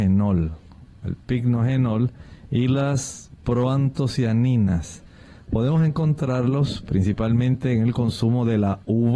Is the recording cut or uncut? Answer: uncut